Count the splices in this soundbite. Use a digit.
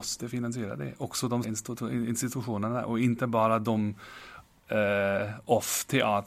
1